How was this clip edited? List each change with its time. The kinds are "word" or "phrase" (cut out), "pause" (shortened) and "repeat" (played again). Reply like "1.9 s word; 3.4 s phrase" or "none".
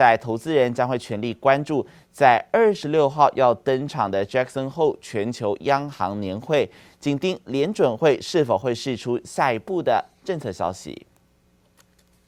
none